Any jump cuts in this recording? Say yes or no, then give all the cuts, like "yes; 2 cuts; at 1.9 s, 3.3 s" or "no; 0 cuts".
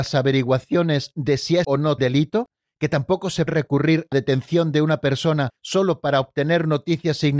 yes; 5 cuts; at 1.6 s, 2.0 s, 3.5 s, 4.1 s, 5.6 s